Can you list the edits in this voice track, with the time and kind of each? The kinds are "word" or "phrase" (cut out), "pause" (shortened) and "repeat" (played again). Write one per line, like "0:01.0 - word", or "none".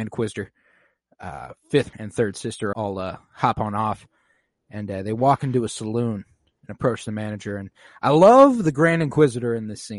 0:01.9 - word
0:02.7 - word